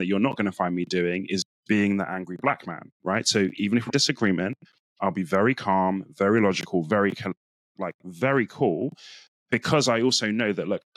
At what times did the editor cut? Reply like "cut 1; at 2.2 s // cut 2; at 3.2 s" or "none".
cut 1; at 3.9 s

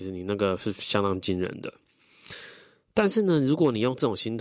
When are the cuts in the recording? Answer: none

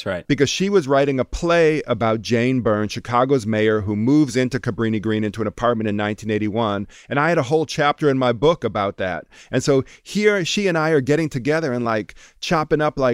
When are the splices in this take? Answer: none

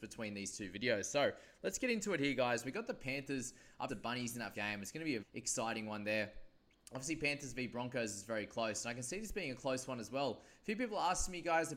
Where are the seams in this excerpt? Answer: cut 1; at 3.9 s // cut 2; at 4.5 s // cut 3; at 5.2 s

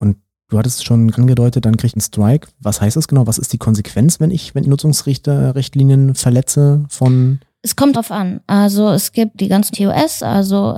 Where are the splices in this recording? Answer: cut 1; at 1.1 s // cut 2; at 2.0 s // cut 3; at 4.6 s // cut 4; at 7.9 s // cut 5; at 9.3 s // cut 6; at 9.7 s

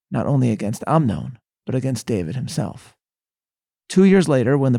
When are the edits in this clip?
none

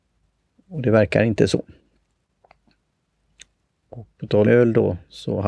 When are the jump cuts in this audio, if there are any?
cut 1; at 4.1 s // cut 2; at 4.4 s

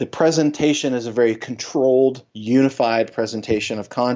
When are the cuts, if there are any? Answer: cut 1; at 2.3 s

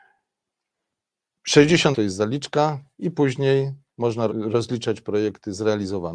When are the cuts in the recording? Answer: cut 1; at 1.9 s // cut 2; at 4.3 s

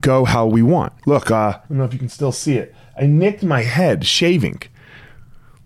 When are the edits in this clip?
cut 1; at 1.0 s // cut 2; at 1.7 s

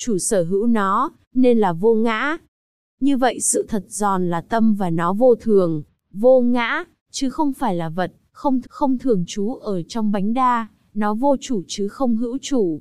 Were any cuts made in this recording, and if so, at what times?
cut 1; at 8.6 s

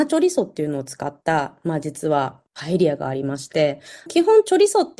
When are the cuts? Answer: cut 1; at 2.5 s // cut 2; at 4.1 s

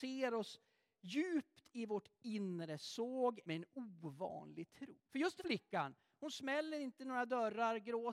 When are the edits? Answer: cut 1; at 2.2 s // cut 2; at 3.4 s // cut 3; at 5.1 s // cut 4; at 5.4 s

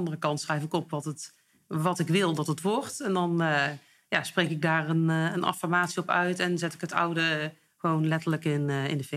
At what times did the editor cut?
none

